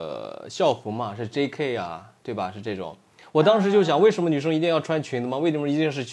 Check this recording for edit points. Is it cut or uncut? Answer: uncut